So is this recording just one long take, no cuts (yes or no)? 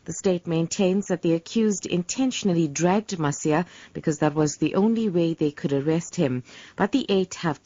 yes